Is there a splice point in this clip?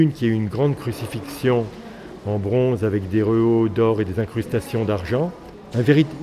no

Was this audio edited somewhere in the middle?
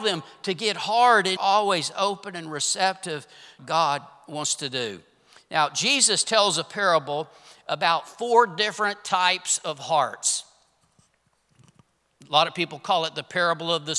yes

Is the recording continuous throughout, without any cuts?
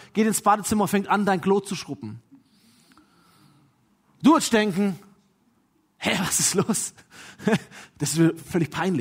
yes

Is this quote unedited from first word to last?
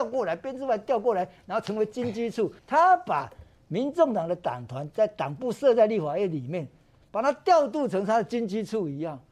no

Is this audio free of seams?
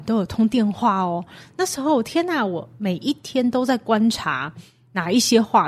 yes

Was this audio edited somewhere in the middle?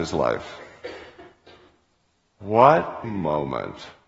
yes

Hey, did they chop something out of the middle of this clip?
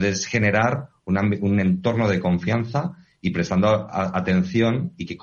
no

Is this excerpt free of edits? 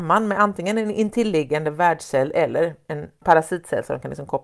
no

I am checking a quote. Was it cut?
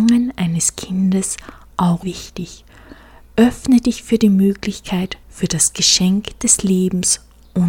yes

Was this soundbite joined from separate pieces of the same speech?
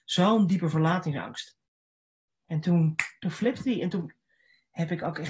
no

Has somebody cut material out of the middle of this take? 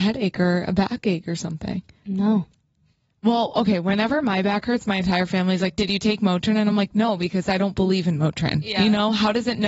no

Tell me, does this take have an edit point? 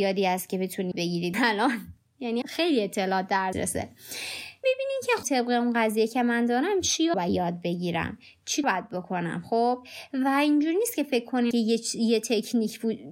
yes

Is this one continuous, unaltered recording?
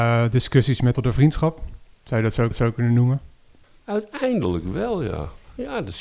no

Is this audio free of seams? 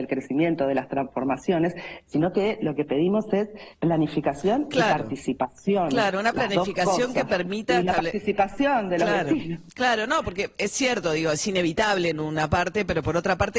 no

